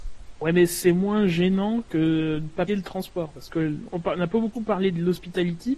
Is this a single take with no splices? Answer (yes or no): no